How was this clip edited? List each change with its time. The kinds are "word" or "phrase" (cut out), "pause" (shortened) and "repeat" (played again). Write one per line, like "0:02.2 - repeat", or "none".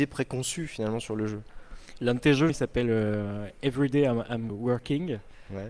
0:02.5 - word
0:04.5 - word